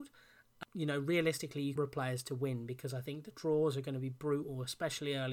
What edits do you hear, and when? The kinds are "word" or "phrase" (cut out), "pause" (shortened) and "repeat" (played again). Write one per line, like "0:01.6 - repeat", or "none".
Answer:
0:01.8 - phrase